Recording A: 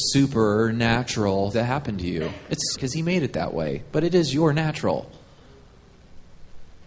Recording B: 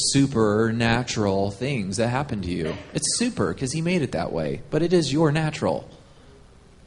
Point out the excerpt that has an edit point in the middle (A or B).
A